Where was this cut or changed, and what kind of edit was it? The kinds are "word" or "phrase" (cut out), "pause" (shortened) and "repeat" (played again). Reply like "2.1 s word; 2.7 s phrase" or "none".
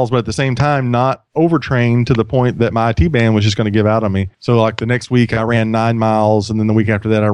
4.3 s pause